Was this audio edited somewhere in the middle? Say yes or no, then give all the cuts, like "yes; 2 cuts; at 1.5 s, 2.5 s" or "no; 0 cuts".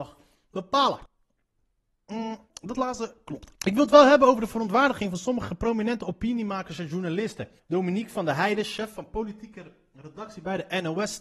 yes; 3 cuts; at 2.5 s, 3.6 s, 7.6 s